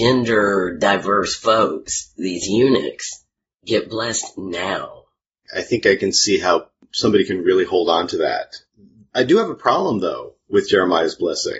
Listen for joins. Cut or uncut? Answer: uncut